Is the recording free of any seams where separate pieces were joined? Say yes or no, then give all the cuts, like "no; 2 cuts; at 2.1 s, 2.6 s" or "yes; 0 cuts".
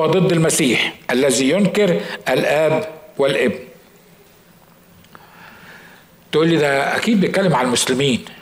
yes; 0 cuts